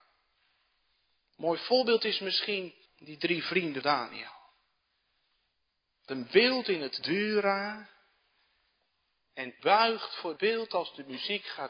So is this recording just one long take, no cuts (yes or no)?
no